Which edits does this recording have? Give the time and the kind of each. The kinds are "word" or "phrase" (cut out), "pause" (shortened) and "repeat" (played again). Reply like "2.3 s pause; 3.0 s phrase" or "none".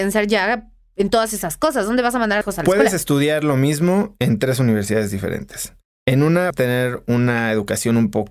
2.4 s phrase; 6.5 s word